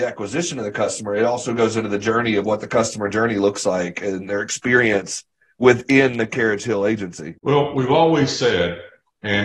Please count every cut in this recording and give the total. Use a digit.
0